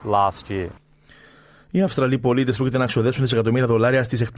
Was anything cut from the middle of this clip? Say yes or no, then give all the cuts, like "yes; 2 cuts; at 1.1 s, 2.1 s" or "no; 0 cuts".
no; 0 cuts